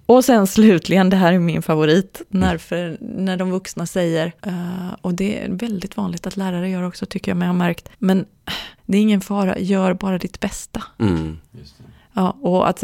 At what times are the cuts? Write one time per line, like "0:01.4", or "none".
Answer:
0:04.4
0:07.9
0:08.8